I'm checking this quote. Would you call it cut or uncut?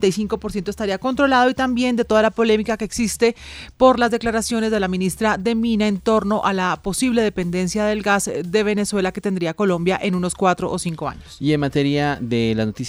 uncut